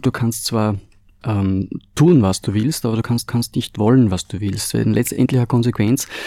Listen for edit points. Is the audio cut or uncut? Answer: cut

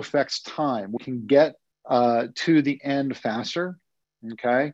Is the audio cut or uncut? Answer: cut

